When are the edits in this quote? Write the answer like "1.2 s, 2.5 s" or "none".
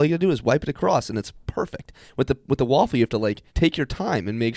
3.5 s